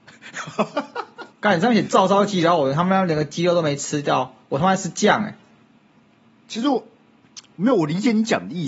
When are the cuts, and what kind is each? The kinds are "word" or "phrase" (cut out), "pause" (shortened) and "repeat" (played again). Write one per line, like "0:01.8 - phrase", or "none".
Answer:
0:01.3 - pause